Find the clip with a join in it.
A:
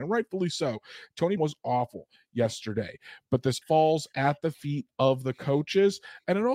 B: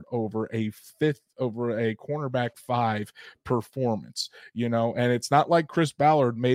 A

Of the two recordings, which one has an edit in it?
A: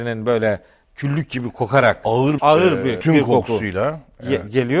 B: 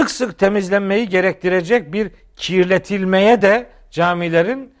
A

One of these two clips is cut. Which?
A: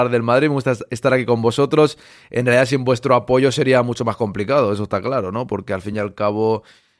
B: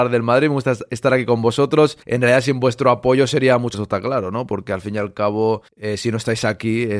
B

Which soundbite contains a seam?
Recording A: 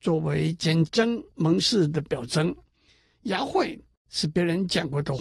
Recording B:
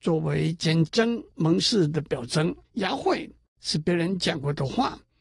B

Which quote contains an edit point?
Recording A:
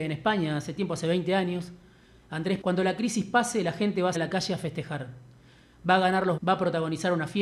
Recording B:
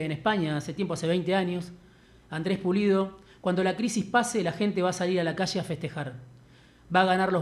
A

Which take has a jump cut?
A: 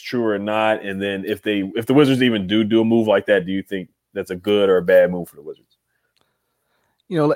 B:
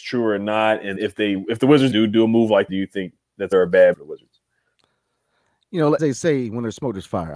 B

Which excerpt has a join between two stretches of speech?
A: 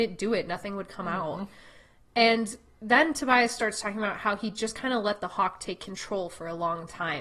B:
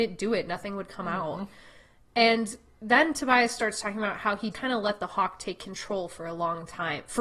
B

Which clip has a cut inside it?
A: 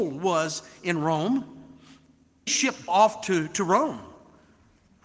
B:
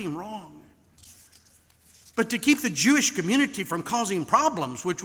A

